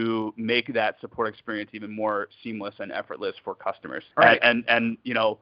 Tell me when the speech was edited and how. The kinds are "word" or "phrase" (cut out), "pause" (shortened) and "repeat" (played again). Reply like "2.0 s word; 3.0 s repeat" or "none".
4.1 s pause